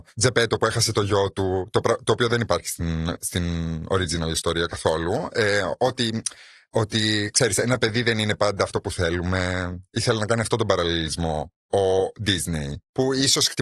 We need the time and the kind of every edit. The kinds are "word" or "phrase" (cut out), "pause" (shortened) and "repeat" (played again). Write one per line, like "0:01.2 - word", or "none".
none